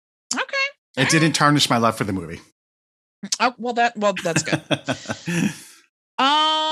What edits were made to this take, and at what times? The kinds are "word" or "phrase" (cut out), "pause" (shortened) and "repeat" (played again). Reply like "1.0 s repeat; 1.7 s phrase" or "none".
4.2 s word